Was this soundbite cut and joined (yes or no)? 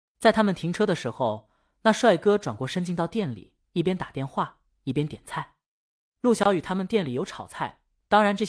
yes